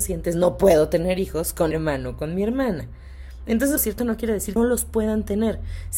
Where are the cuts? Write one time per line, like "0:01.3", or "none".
0:01.7
0:03.8
0:04.6